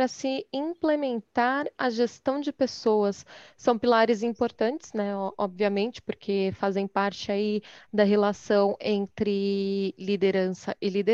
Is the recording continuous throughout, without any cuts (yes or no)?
yes